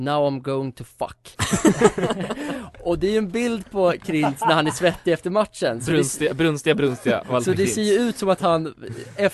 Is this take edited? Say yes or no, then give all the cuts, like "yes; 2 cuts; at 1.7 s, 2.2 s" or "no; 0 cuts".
no; 0 cuts